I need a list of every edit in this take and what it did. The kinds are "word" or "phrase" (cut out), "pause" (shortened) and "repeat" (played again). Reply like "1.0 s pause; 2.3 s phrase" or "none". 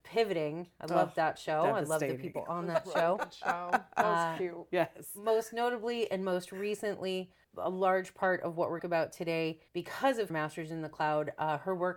7.4 s word; 8.8 s phrase; 9.7 s pause; 10.3 s word